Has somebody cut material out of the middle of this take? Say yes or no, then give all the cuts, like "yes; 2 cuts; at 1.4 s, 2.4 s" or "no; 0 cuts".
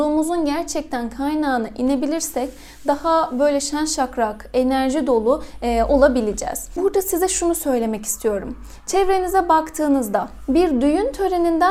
no; 0 cuts